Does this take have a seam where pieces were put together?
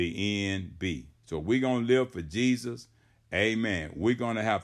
yes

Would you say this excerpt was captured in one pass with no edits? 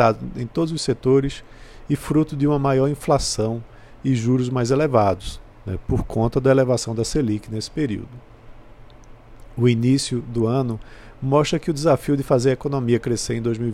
yes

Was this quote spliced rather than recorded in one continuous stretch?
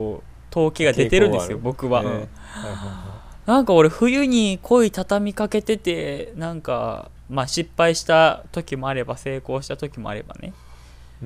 yes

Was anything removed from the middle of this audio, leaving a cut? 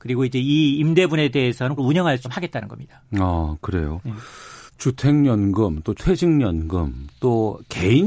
yes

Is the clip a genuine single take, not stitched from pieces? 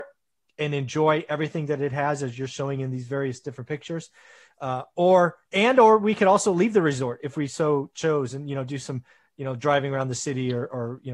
yes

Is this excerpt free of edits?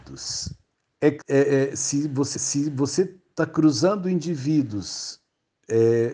no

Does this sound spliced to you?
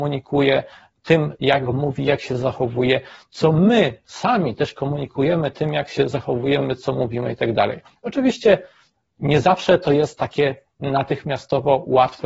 no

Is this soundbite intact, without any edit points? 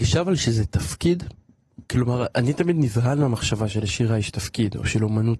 no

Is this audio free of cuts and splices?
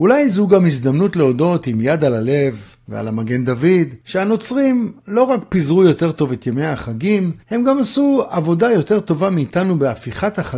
no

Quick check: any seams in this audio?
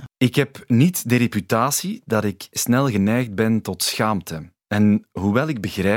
yes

